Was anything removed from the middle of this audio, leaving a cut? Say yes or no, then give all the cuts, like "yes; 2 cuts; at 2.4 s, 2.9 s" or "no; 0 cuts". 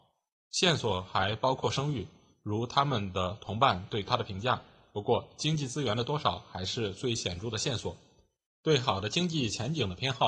no; 0 cuts